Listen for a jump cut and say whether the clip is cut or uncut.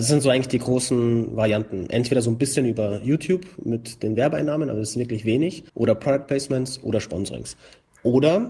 cut